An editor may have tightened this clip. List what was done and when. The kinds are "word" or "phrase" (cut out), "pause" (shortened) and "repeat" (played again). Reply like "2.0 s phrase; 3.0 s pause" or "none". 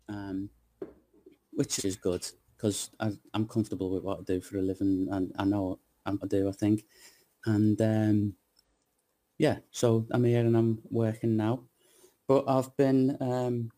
1.8 s phrase; 6.2 s phrase; 9.7 s pause